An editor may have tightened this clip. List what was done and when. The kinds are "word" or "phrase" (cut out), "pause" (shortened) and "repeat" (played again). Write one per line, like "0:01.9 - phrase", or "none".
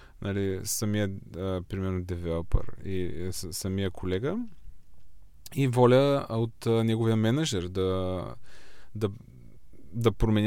none